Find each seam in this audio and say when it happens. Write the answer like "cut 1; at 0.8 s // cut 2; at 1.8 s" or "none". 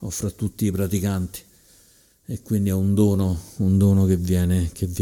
none